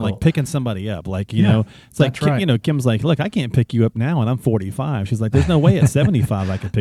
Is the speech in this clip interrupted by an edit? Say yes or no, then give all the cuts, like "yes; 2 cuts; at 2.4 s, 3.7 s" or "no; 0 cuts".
no; 0 cuts